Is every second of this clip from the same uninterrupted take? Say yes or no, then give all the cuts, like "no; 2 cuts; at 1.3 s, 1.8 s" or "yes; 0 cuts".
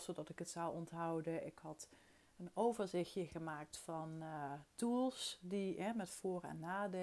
yes; 0 cuts